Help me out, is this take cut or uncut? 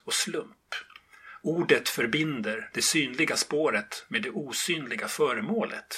uncut